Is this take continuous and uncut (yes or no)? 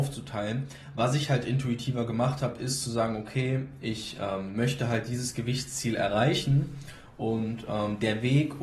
yes